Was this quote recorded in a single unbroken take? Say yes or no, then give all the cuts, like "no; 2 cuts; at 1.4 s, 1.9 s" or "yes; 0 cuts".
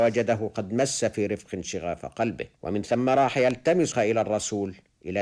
no; 2 cuts; at 2.6 s, 3.9 s